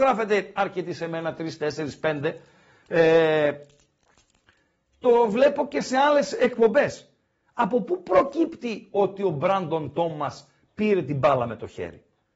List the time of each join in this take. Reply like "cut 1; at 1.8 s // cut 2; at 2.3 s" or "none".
none